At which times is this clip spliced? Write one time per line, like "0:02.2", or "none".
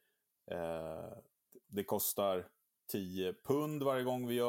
0:01.6